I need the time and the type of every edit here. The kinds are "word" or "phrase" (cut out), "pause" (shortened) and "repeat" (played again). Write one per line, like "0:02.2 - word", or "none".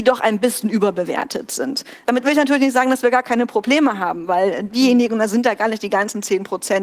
none